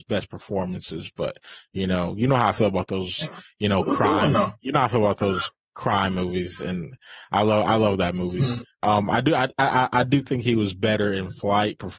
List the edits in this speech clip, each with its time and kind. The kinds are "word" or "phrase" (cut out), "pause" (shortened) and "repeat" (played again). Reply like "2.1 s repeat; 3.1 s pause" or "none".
none